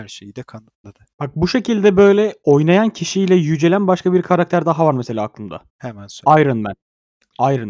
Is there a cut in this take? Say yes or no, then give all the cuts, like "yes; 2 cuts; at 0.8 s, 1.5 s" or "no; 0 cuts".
yes; 1 cut; at 5.7 s